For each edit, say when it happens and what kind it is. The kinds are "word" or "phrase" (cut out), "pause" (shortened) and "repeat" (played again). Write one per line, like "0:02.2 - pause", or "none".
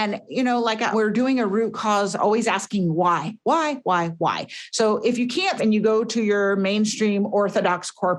0:00.9 - phrase
0:02.2 - phrase
0:03.8 - word
0:05.6 - word